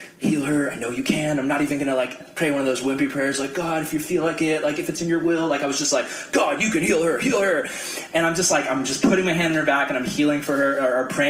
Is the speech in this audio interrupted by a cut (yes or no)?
no